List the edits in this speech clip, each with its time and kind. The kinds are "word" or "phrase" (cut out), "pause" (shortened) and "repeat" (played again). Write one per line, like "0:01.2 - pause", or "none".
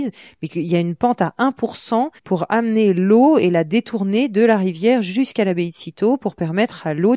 0:02.2 - pause